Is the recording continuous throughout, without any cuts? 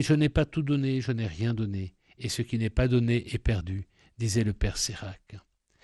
yes; 0 cuts

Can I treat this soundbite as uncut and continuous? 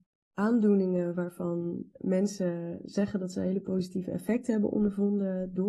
yes; 0 cuts

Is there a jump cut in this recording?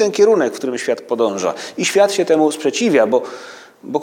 no; 0 cuts

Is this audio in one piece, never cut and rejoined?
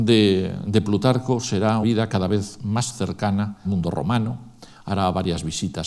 no; 2 cuts; at 1.8 s, 3.6 s

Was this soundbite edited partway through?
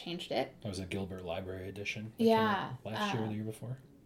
no; 0 cuts

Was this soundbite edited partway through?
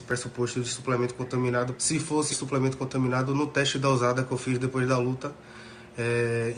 yes; 2 cuts; at 1.7 s, 2.3 s

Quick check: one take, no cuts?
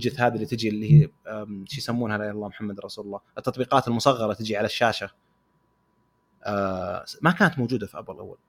yes; 0 cuts

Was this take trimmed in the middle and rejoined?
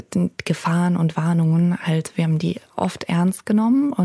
no; 0 cuts

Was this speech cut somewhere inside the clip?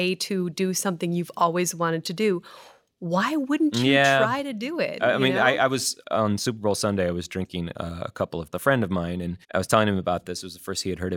yes; 3 cuts; at 6.0 s, 8.5 s, 9.4 s

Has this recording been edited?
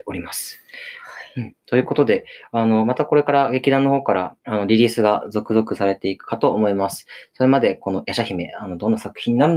yes; 1 cut; at 4.4 s

